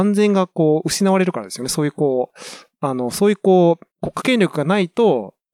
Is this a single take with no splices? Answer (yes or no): no